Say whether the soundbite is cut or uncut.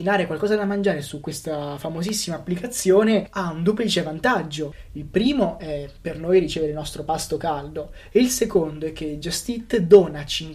uncut